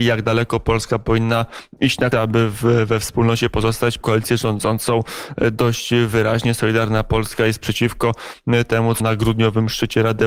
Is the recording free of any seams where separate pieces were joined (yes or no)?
no